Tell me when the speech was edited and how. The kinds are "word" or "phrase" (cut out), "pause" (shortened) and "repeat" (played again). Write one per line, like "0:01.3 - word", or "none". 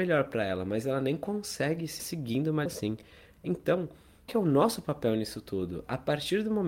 0:02.0 - word
0:02.7 - word
0:04.3 - word